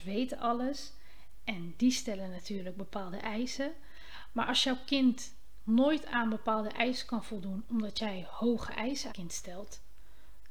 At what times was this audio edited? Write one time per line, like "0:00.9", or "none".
0:09.1

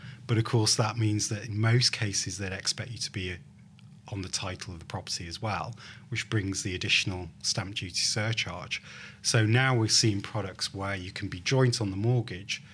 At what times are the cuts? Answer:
none

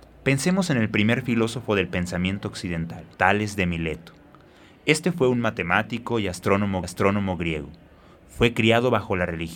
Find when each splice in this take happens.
0:03.1
0:06.8

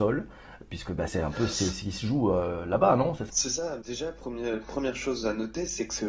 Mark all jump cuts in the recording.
0:01.1
0:03.3
0:03.8

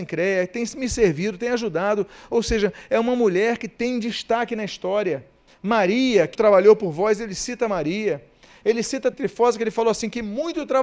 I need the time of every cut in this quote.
0:05.5
0:06.3
0:09.1

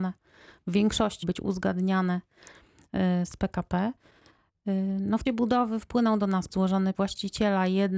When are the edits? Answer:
0:01.2
0:05.3
0:06.5
0:06.9

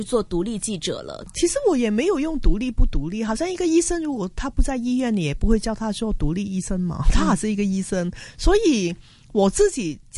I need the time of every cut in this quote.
none

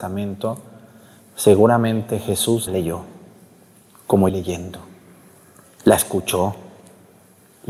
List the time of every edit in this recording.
0:02.7
0:04.3

